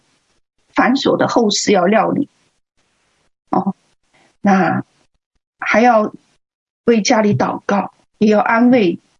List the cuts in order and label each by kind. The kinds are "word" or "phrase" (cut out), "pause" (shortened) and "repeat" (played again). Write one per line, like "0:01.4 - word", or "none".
none